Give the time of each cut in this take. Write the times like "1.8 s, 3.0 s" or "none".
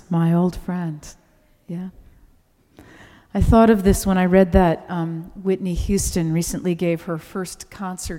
none